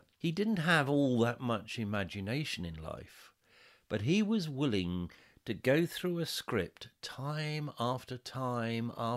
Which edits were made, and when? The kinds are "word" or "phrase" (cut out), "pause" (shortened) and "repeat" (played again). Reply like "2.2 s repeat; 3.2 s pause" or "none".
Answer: none